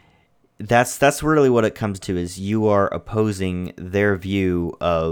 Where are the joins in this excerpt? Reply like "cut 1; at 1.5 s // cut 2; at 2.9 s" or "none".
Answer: cut 1; at 2.0 s